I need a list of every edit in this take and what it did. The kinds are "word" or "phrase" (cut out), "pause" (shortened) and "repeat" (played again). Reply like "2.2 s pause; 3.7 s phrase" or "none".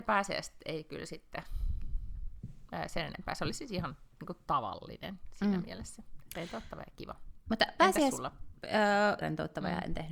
9.2 s phrase